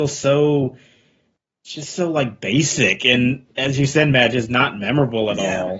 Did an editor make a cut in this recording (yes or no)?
no